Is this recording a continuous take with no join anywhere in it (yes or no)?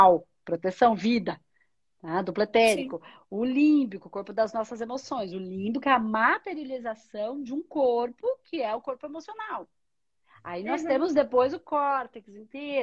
yes